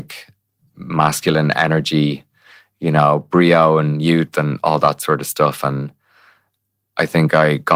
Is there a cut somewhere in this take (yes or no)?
no